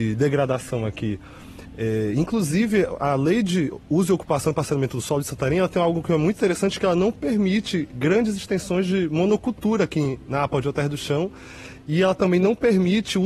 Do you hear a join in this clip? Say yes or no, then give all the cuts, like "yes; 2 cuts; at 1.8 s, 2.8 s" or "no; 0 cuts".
no; 0 cuts